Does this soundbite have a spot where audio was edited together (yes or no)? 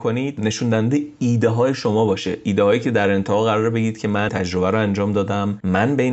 yes